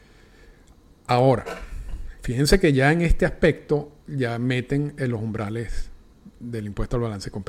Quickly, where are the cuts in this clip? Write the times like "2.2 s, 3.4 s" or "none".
4.0 s

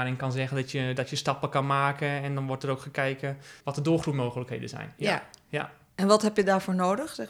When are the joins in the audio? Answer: 3.6 s

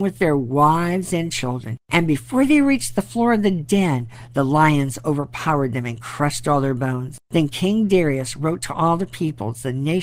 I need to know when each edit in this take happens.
1.8 s, 7.2 s

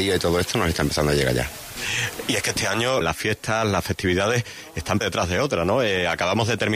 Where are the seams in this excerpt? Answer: 3.0 s, 5.0 s

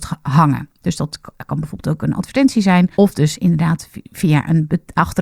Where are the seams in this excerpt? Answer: 2.9 s

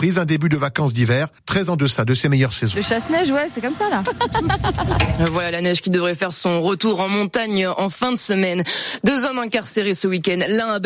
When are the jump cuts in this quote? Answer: 1.4 s

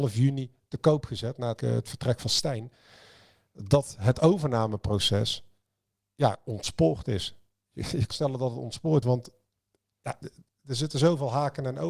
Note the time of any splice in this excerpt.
1.6 s, 6.0 s, 8.1 s, 9.0 s, 10.2 s

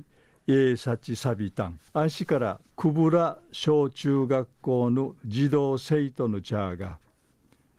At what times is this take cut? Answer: 1.9 s, 2.7 s

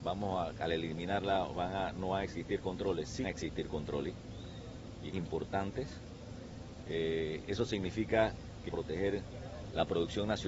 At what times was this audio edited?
3.2 s, 5.1 s, 8.7 s

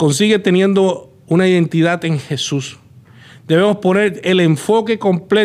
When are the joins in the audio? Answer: none

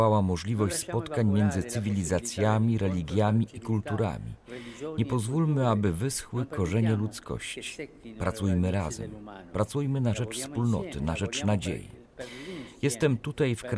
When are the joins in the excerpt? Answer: none

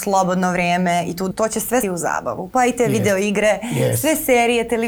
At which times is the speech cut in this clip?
1.3 s, 1.8 s

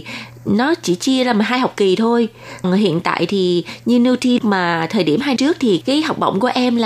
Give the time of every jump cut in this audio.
2.6 s, 4.4 s, 5.4 s, 5.8 s

